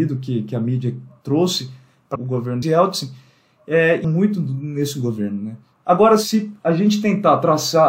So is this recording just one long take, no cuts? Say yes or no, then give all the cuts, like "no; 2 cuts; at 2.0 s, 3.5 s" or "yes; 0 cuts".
no; 3 cuts; at 2.2 s, 2.6 s, 4.0 s